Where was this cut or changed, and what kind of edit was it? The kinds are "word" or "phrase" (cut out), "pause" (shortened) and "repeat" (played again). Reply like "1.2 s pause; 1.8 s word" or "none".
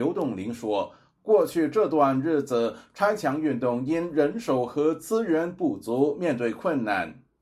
none